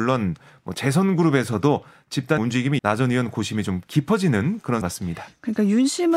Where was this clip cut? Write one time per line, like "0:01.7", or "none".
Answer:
0:02.4
0:02.8
0:04.8